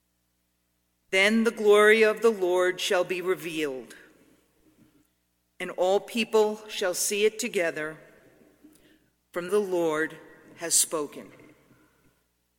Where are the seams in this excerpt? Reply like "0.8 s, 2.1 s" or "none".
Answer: 9.5 s